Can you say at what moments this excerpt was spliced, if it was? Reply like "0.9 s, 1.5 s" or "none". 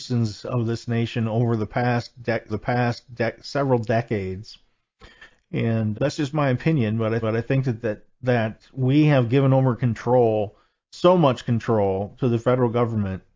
2.5 s, 5.9 s, 7.2 s